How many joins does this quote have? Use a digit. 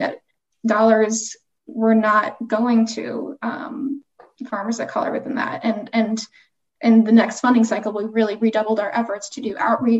0